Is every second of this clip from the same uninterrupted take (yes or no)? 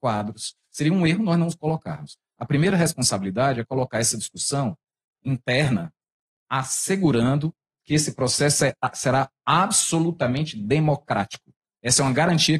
yes